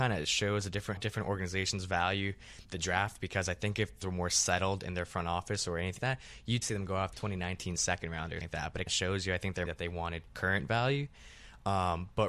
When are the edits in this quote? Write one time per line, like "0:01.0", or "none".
0:01.0
0:04.0
0:06.0
0:06.6
0:07.1
0:08.4
0:08.9
0:09.7